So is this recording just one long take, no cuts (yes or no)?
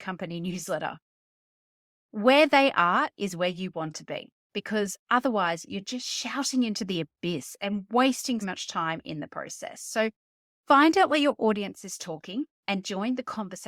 no